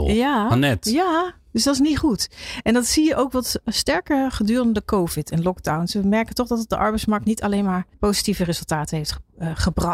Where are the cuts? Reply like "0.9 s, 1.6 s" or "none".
7.9 s